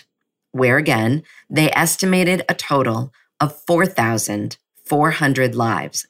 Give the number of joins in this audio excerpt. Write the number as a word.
zero